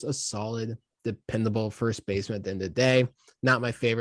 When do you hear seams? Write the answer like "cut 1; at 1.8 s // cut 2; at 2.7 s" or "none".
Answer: none